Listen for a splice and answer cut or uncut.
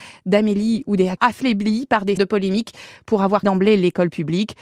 cut